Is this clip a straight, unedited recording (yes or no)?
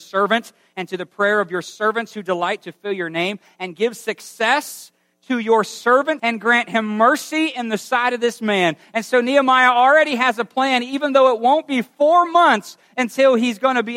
no